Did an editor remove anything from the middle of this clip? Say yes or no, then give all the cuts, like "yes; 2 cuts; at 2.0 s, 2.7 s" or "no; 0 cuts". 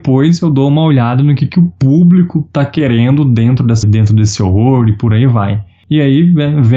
yes; 1 cut; at 3.8 s